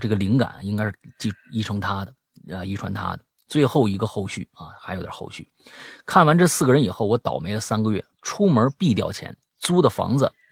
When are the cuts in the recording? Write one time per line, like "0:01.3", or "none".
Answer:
none